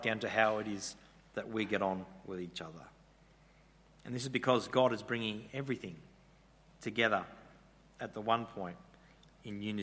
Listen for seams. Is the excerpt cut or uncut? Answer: uncut